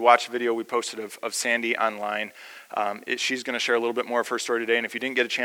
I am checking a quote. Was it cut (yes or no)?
no